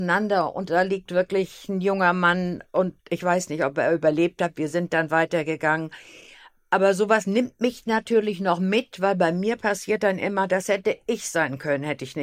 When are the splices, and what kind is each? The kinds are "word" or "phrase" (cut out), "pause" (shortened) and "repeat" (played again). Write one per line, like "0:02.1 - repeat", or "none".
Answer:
none